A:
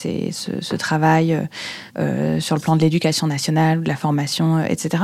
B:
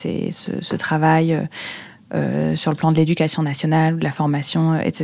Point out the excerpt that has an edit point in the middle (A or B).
A